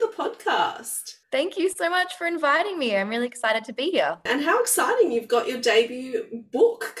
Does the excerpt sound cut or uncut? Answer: cut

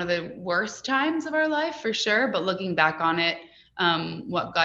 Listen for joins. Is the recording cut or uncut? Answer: uncut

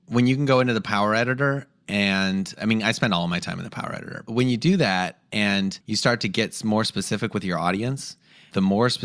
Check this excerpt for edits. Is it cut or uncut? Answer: cut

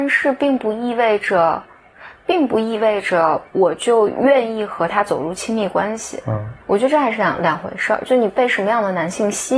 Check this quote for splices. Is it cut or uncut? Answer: cut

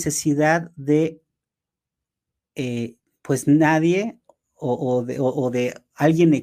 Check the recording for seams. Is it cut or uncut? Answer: uncut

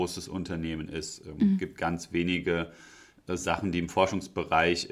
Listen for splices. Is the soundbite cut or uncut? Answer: uncut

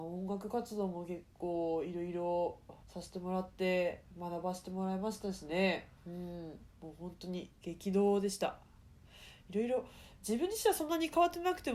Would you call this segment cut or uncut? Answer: cut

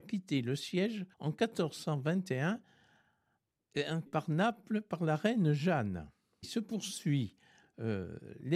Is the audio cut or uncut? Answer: cut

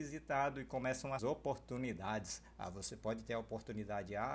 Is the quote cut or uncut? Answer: cut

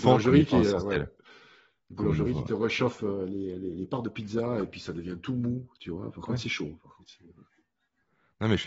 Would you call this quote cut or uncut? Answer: uncut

